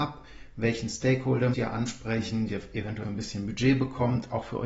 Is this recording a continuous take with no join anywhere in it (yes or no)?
no